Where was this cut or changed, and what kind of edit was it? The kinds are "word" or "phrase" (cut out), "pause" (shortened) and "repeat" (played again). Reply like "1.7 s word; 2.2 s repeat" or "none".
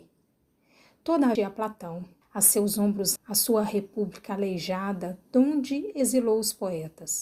1.3 s phrase; 2.2 s pause; 3.2 s word